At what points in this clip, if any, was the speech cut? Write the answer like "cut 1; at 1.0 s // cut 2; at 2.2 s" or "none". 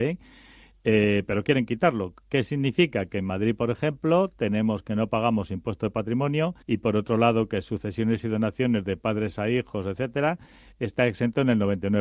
cut 1; at 6.6 s